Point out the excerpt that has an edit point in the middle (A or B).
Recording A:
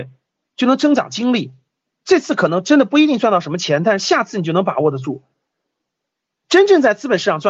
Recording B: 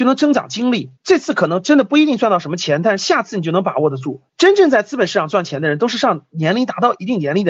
B